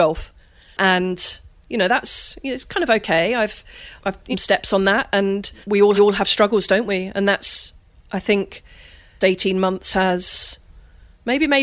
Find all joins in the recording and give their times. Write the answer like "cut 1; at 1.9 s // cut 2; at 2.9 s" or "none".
cut 1; at 4.0 s // cut 2; at 4.3 s // cut 3; at 5.6 s // cut 4; at 6.0 s // cut 5; at 9.2 s